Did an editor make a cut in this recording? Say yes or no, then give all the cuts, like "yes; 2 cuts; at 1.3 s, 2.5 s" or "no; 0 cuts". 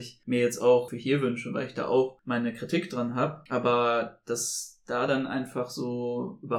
no; 0 cuts